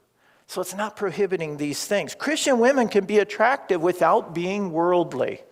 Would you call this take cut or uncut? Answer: uncut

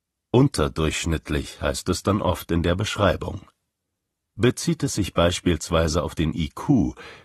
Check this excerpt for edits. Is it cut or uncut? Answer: uncut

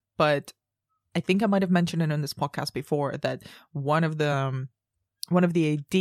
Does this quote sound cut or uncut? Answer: uncut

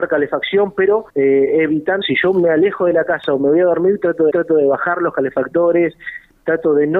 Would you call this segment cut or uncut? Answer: cut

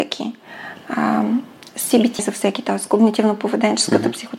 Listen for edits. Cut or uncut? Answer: cut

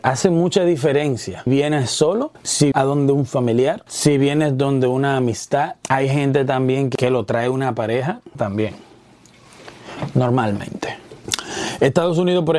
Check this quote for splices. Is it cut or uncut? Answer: cut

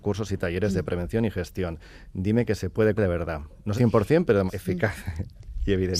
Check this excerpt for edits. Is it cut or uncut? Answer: cut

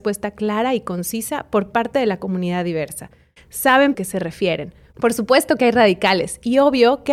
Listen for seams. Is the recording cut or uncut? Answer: cut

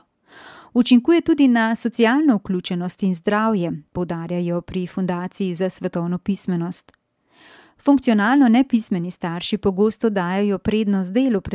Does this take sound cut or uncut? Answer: uncut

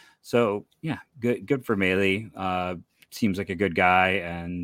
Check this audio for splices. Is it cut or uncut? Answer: uncut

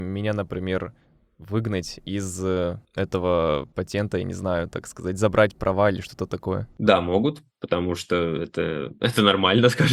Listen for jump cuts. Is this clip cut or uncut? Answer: uncut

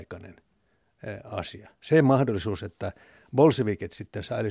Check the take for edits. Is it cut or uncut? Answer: uncut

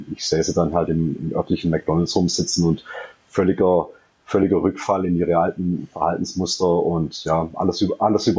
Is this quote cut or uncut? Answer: uncut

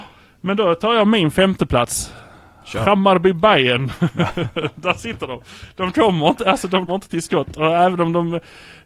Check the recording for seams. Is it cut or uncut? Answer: cut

